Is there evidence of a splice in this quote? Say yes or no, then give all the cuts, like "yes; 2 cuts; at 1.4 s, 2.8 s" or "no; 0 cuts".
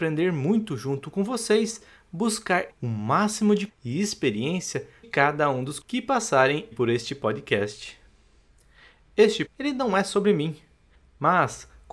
yes; 6 cuts; at 2.7 s, 3.7 s, 5.0 s, 5.8 s, 6.7 s, 9.5 s